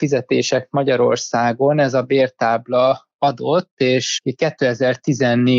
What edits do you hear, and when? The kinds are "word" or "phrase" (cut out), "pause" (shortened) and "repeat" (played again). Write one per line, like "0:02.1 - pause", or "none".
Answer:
none